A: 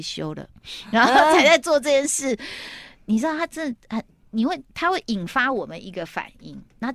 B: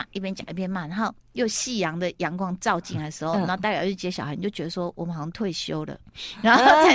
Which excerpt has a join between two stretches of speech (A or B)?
A